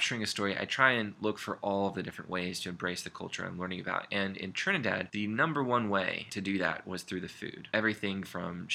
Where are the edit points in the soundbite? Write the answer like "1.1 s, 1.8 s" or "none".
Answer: none